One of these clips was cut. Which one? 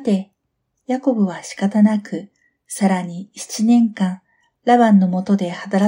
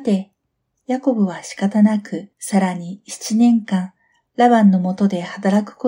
second; 1 cut; at 2.3 s

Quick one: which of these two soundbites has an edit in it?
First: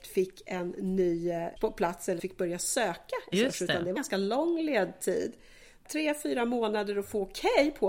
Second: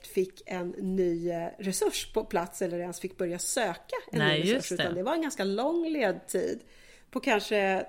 first; 5 cuts; at 1.6 s, 2.2 s, 3.3 s, 4.0 s, 5.9 s

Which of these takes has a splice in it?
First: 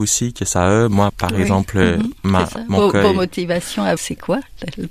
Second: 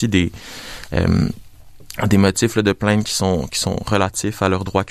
first; 2 cuts; at 1.1 s, 4.0 s

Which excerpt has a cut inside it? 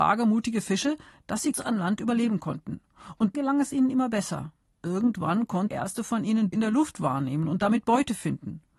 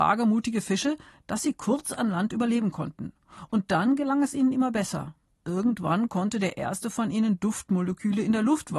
first; 4 cuts; at 1.5 s, 3.3 s, 5.7 s, 6.5 s

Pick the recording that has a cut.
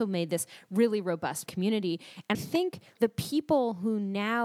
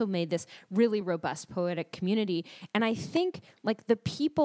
first; 3 cuts; at 1.5 s, 2.3 s, 3.0 s

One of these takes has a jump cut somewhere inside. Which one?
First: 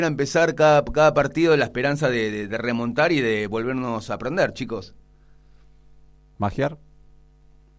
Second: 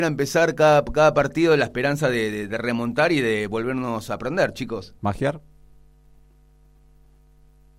second; 1 cut; at 5.0 s

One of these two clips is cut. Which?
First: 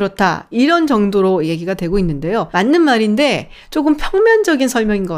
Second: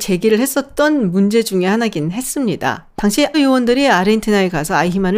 second; 1 cut; at 3.3 s

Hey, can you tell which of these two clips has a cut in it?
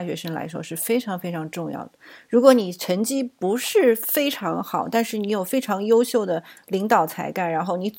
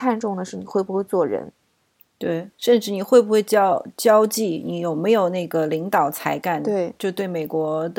second; 1 cut; at 2.5 s

